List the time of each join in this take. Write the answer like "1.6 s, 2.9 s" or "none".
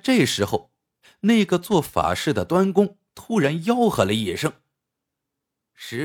none